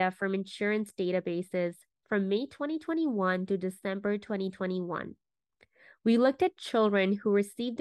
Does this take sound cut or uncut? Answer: uncut